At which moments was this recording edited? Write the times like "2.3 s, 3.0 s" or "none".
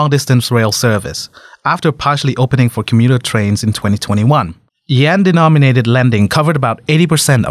none